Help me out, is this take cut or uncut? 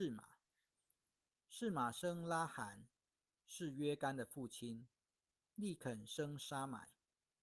uncut